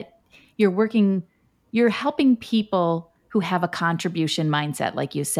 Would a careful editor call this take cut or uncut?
uncut